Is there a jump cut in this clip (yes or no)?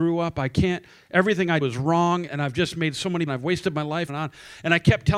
yes